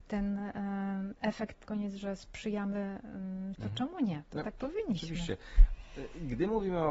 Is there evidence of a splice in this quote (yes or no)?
yes